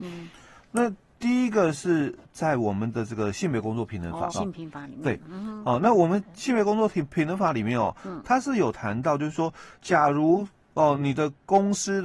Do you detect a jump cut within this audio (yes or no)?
yes